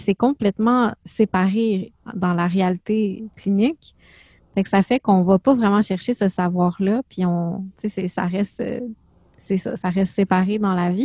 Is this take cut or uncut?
uncut